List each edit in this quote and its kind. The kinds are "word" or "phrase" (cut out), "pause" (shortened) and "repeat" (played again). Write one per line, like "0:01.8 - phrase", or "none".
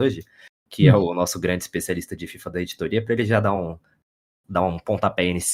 none